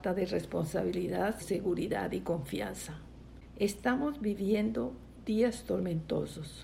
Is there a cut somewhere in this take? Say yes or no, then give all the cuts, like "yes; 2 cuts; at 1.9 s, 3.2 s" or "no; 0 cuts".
yes; 1 cut; at 1.4 s